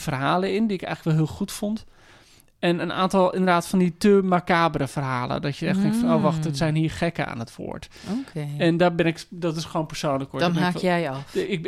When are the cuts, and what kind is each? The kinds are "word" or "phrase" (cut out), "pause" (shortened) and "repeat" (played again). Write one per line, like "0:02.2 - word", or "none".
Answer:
none